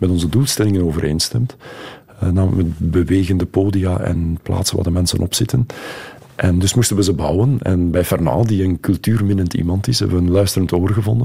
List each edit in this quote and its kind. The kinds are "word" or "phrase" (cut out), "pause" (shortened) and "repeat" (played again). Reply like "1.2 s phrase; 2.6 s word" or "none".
none